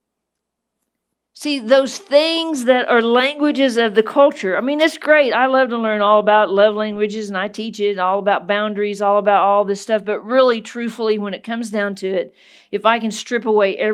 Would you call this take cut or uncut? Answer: uncut